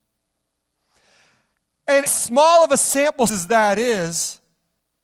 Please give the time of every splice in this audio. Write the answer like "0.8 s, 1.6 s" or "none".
2.1 s, 3.3 s